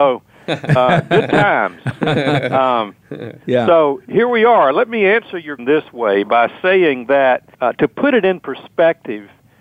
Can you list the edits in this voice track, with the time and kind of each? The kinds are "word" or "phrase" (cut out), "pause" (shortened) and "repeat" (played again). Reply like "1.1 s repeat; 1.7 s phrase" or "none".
5.6 s word; 7.5 s pause